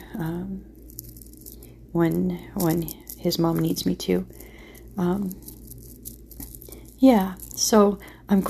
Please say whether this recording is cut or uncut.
uncut